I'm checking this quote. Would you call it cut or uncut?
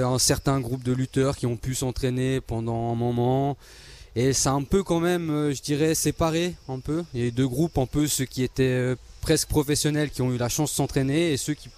uncut